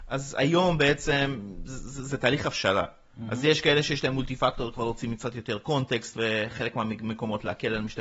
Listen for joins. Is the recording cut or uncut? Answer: uncut